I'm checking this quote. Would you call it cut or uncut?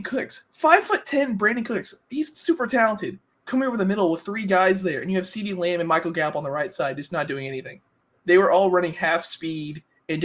cut